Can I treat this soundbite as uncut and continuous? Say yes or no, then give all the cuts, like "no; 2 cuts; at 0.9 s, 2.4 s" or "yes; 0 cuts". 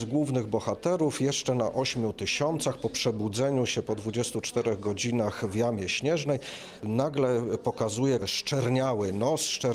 no; 1 cut; at 8.2 s